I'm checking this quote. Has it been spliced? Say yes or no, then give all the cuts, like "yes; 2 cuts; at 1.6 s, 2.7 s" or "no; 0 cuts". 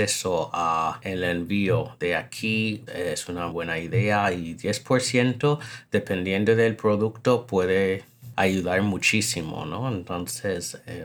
yes; 2 cuts; at 2.9 s, 3.5 s